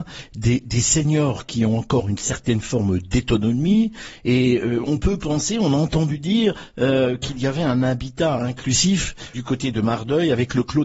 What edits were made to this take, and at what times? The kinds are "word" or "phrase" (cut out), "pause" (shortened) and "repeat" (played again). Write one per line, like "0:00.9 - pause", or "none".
0:09.3 - word